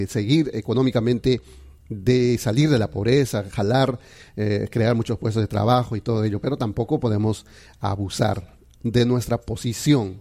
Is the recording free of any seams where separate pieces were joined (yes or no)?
yes